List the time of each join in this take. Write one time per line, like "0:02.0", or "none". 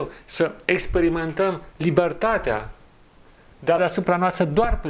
0:03.8

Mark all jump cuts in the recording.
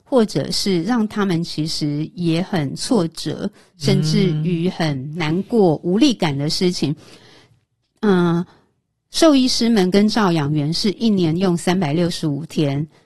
none

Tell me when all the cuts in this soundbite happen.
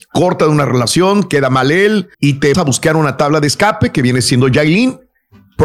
0:02.1
0:02.5

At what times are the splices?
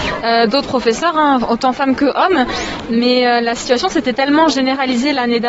none

